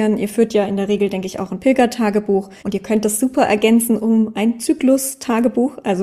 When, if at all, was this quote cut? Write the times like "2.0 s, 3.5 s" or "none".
2.6 s